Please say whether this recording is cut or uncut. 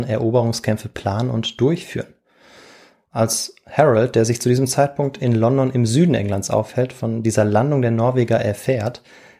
uncut